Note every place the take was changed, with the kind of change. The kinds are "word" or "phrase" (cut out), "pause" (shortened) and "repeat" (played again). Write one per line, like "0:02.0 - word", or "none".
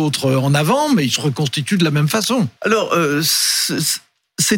0:02.6 - pause